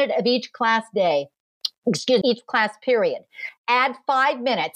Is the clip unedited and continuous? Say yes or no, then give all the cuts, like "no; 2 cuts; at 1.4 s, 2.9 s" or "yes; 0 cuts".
no; 1 cut; at 2.2 s